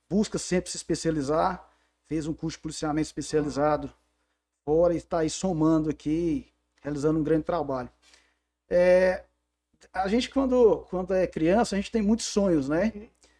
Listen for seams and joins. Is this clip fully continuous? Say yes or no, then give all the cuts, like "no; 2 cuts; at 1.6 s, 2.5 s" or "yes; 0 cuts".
yes; 0 cuts